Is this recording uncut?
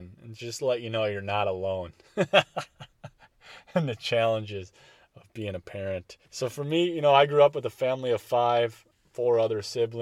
no; 1 cut; at 6.3 s

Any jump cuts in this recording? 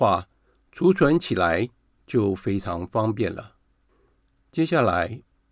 no; 0 cuts

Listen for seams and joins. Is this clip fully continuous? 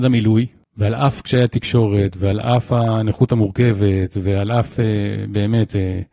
yes; 0 cuts

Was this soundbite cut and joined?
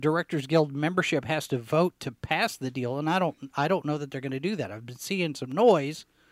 no; 0 cuts

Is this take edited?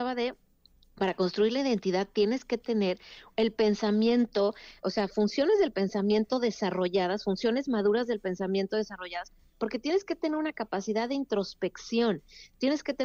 no; 0 cuts

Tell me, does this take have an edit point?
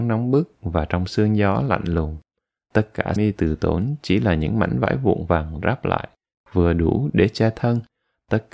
yes; 1 cut; at 3.2 s

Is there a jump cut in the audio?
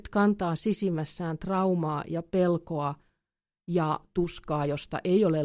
no; 0 cuts

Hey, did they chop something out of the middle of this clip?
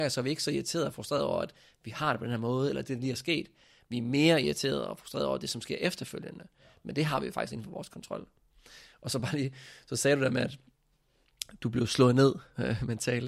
no; 0 cuts

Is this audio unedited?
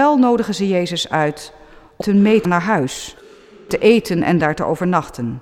no; 2 cuts; at 2.0 s, 2.4 s

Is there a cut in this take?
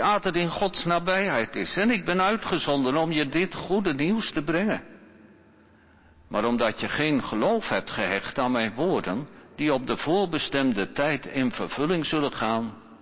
no; 0 cuts

